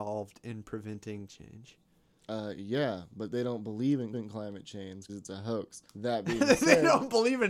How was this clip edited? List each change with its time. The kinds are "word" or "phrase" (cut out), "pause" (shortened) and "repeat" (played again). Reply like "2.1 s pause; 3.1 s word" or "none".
1.3 s word; 4.1 s repeat; 5.1 s word; 5.9 s pause